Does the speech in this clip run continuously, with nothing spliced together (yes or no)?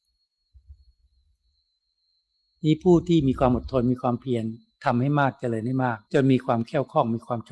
no